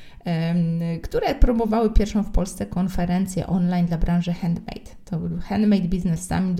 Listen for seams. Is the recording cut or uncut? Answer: uncut